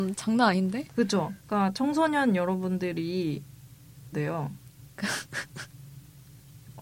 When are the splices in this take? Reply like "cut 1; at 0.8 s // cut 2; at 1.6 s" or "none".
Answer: cut 1; at 1.4 s // cut 2; at 4.1 s